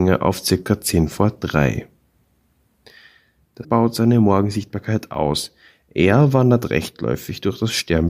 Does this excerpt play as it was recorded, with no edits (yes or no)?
no